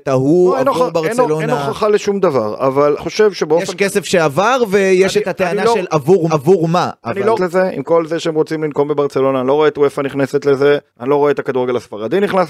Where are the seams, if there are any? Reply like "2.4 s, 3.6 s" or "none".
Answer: 3.0 s, 6.3 s, 7.3 s, 10.9 s